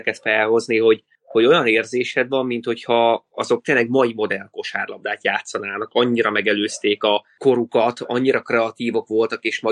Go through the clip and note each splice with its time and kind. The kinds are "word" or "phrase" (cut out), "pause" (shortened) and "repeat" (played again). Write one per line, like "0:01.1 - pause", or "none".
none